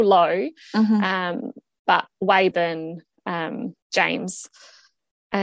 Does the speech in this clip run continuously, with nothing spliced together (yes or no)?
no